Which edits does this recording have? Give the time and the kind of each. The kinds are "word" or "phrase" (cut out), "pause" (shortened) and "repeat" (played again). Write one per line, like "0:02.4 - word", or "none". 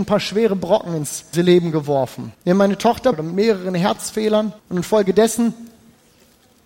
0:01.3 - word
0:02.3 - pause
0:03.1 - phrase
0:04.6 - pause